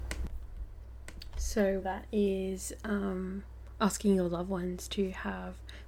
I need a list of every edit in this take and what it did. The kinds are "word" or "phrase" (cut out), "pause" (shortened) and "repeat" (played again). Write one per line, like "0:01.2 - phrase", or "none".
0:01.8 - word